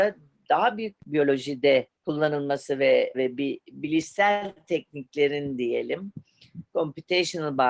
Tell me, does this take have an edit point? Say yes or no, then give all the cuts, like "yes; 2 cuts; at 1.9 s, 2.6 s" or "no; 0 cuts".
yes; 3 cuts; at 1.0 s, 2.0 s, 3.1 s